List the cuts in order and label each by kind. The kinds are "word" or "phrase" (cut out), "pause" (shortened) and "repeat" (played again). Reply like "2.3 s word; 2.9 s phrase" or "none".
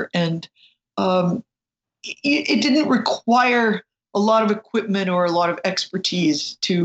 2.0 s word